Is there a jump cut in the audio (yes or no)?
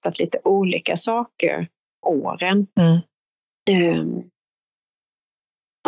yes